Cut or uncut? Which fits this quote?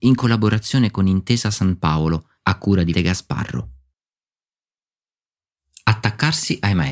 cut